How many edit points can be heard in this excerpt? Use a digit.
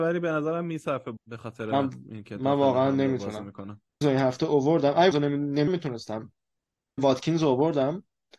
5